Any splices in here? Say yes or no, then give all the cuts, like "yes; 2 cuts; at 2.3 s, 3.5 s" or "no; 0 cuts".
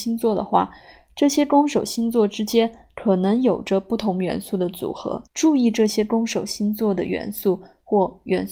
yes; 1 cut; at 5.3 s